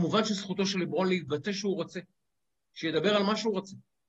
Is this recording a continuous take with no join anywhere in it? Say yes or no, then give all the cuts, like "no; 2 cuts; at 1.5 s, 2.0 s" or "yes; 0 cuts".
no; 1 cut; at 1.5 s